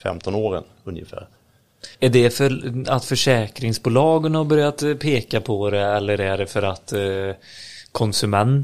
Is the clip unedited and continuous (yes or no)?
no